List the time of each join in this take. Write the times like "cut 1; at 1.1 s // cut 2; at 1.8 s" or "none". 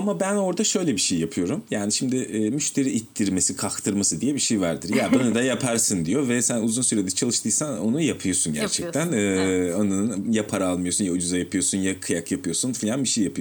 none